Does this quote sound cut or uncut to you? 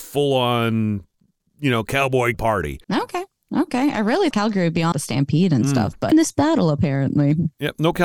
cut